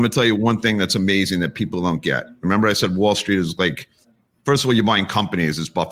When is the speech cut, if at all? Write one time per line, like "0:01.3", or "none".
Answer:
0:04.0